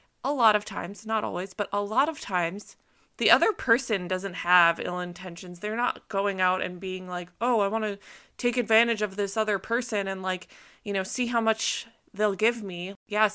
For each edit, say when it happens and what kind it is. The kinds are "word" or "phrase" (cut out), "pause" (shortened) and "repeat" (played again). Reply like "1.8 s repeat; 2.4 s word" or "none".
none